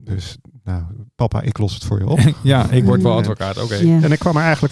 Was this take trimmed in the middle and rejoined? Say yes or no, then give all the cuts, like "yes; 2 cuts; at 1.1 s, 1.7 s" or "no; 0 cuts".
no; 0 cuts